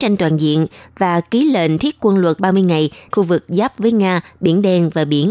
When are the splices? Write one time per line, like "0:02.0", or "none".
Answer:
0:02.4
0:03.1